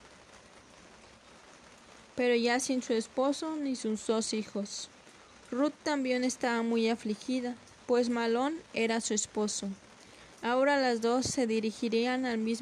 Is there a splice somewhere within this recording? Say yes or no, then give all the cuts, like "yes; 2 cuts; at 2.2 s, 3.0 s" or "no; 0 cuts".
no; 0 cuts